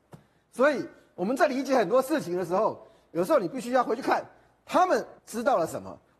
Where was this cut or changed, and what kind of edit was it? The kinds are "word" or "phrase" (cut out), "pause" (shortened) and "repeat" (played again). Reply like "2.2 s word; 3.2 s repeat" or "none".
5.2 s pause